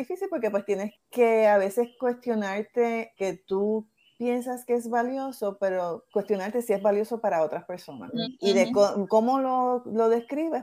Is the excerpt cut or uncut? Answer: cut